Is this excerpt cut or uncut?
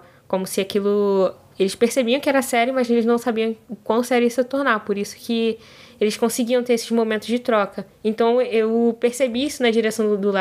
uncut